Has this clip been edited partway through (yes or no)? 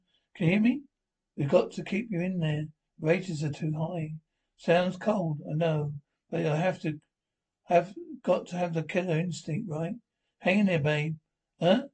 no